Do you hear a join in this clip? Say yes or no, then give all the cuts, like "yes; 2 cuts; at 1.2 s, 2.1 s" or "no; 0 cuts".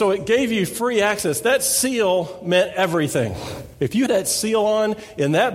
yes; 1 cut; at 4.1 s